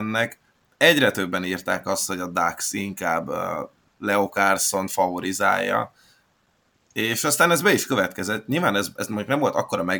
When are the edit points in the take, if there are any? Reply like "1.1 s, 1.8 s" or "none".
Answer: none

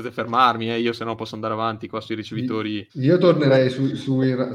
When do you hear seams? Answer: 2.9 s

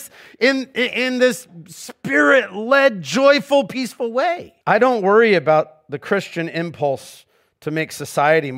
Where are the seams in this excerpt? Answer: 4.6 s

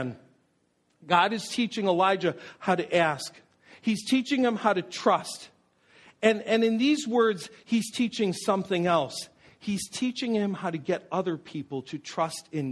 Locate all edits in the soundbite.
none

